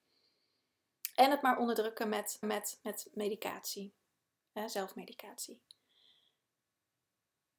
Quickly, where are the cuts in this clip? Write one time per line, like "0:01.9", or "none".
0:02.4